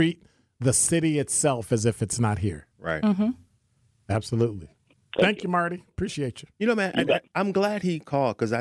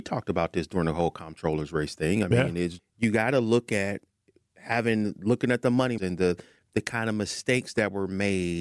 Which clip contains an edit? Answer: second; 2 cuts; at 2.8 s, 6.0 s

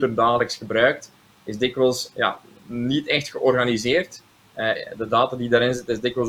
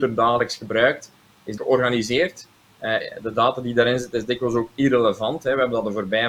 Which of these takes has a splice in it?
second; 1 cut; at 1.6 s

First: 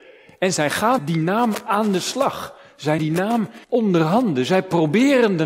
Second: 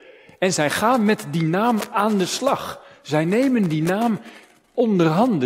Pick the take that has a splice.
first; 3 cuts; at 1.0 s, 3.0 s, 3.6 s

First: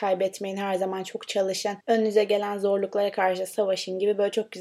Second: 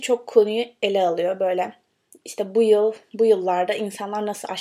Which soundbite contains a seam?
first; 1 cut; at 1.8 s

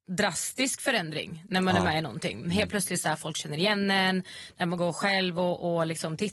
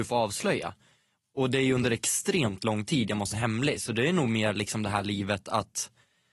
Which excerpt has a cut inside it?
second; 1 cut; at 3.3 s

